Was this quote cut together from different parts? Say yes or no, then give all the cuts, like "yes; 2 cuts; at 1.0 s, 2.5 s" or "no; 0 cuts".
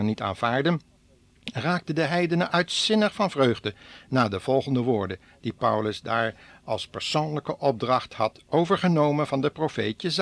no; 0 cuts